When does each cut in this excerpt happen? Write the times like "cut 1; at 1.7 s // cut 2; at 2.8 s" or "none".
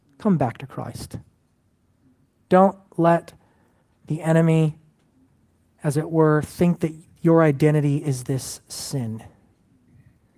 none

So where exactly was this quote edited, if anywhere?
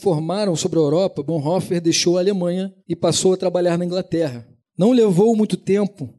cut 1; at 2.8 s // cut 2; at 4.7 s

